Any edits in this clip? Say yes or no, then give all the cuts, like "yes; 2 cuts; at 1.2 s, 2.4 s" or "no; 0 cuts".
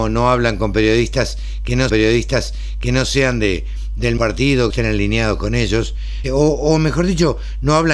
yes; 4 cuts; at 1.9 s, 4.2 s, 4.7 s, 6.2 s